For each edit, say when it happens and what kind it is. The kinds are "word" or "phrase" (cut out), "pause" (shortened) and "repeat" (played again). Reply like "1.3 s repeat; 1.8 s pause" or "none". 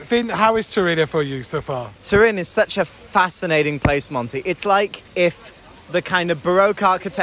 2.0 s pause; 5.1 s pause